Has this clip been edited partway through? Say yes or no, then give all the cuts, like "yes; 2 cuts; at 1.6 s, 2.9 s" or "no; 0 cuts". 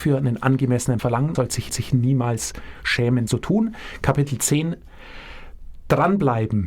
yes; 4 cuts; at 1.0 s, 1.3 s, 1.7 s, 3.3 s